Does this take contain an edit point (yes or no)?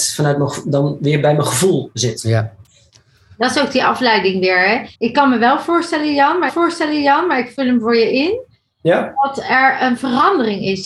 yes